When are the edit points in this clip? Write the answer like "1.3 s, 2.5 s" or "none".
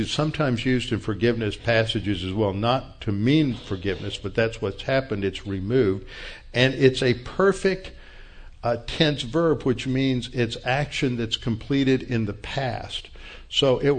none